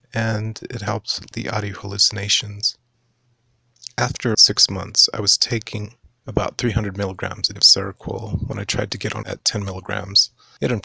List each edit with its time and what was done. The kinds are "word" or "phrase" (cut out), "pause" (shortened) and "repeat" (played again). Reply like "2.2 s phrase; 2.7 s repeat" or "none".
1.3 s word; 4.3 s word; 7.6 s word; 9.2 s word